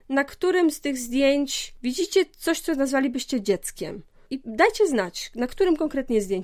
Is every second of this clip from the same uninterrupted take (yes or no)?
yes